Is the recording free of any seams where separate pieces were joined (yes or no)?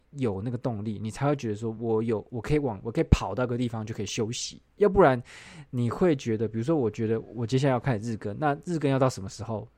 yes